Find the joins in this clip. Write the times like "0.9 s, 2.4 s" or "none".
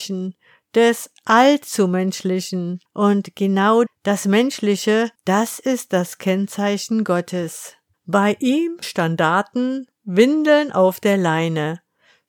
2.9 s, 3.9 s, 5.2 s, 7.9 s, 8.8 s